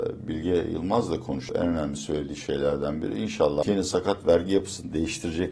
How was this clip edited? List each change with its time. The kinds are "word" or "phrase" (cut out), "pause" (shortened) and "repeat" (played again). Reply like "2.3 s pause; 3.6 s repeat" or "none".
3.6 s word